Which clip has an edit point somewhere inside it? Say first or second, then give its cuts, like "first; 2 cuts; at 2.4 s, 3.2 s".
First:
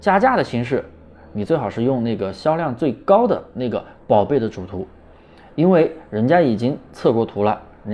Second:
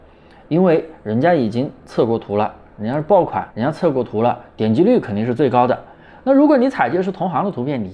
second; 1 cut; at 3.5 s